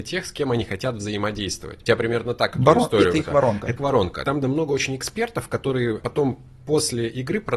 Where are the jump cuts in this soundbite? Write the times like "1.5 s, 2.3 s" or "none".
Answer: 1.9 s, 3.8 s, 4.4 s, 6.0 s